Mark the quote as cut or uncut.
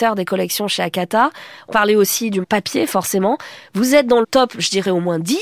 cut